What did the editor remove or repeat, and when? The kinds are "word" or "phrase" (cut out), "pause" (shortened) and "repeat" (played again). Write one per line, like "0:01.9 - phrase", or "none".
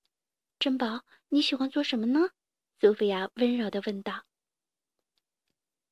0:02.5 - pause